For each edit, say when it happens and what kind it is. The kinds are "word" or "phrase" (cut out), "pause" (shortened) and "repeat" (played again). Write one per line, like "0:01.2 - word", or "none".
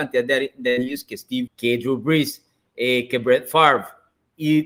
0:01.5 - word

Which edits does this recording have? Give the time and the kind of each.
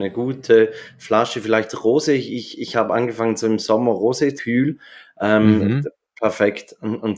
0:04.4 - phrase

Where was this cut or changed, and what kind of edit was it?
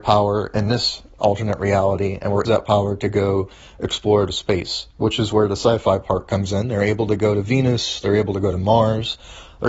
0:02.4 - phrase

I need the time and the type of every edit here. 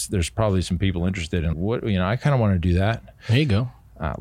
0:01.5 - word

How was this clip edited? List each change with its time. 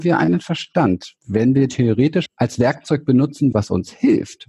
0:01.2 - pause
0:01.7 - word
0:02.3 - word
0:03.5 - phrase

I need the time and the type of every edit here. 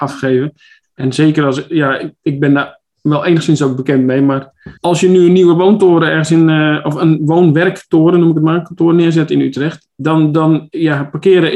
0:04.8 - pause

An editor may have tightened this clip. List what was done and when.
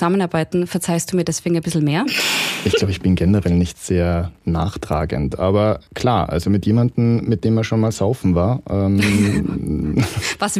0:05.9 - pause

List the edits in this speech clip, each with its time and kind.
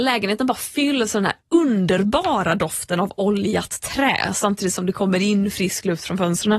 none

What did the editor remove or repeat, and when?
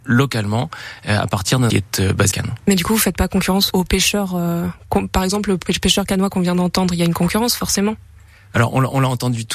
0:01.7 - phrase
0:02.3 - word
0:03.7 - word

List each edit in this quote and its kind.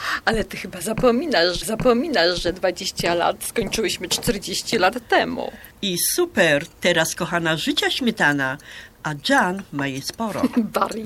0:01.6 - repeat
0:05.7 - pause

